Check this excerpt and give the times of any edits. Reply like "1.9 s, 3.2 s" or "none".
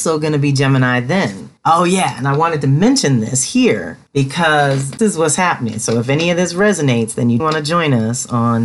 5.0 s, 7.4 s